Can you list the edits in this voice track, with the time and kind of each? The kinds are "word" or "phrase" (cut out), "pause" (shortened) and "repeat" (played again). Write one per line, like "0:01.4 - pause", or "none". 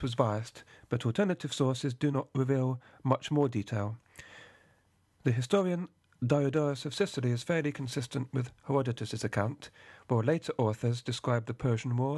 none